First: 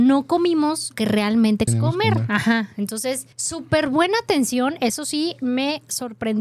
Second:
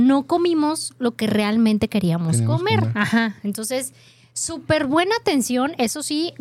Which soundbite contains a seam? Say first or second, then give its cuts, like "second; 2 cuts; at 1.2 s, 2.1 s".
first; 3 cuts; at 0.9 s, 1.7 s, 3.3 s